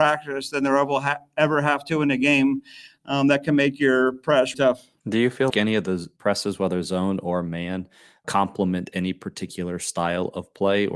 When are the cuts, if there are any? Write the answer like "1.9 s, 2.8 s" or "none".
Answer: 4.5 s, 5.5 s

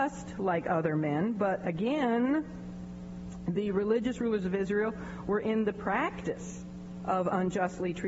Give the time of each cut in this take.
none

